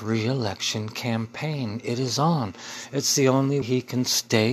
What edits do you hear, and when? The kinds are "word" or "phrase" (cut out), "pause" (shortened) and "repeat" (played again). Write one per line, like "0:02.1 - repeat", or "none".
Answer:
0:03.6 - word